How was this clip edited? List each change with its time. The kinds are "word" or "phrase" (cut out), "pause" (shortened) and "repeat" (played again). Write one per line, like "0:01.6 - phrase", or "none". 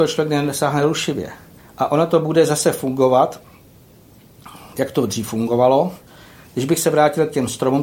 0:01.6 - pause